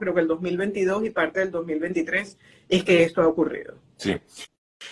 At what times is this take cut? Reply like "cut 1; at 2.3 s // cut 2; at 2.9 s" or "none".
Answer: none